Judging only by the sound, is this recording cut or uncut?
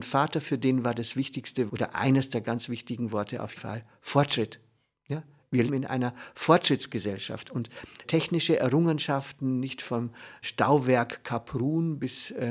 cut